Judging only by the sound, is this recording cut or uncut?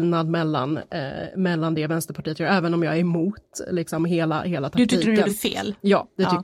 uncut